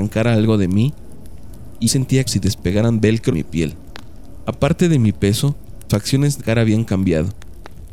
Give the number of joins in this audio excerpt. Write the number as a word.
five